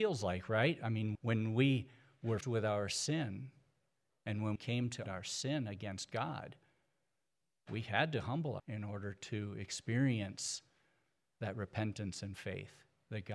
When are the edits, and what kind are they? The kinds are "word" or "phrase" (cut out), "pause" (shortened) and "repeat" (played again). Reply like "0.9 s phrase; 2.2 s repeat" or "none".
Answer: 1.1 s word; 2.4 s word; 4.6 s word; 5.1 s word; 8.6 s word